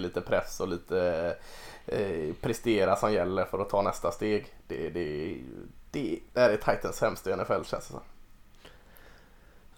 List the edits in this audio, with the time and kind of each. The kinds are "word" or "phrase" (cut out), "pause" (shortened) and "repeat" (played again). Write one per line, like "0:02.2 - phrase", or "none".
0:05.9 - pause